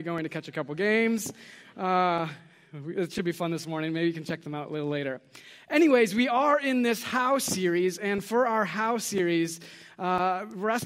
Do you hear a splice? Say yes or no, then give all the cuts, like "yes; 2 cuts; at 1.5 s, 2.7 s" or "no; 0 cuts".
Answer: no; 0 cuts